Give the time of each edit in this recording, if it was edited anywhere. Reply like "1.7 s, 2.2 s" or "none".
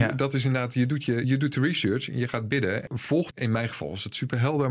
1.2 s, 2.9 s, 3.3 s

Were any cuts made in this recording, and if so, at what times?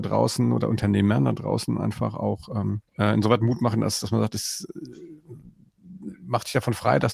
2.9 s

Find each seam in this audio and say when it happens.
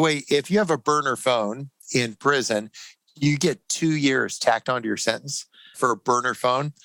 5.7 s

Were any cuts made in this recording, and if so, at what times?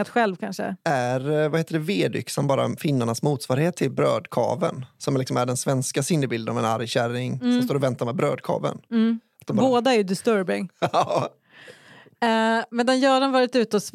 none

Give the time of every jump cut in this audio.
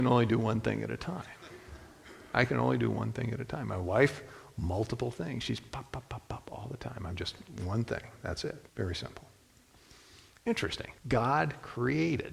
8.7 s, 11.0 s

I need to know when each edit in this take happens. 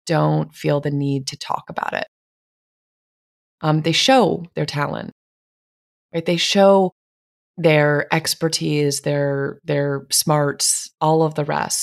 none

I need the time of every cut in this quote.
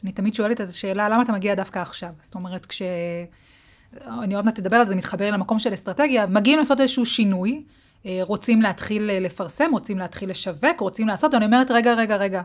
6.3 s

